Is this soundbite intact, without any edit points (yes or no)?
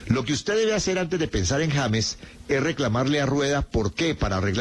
yes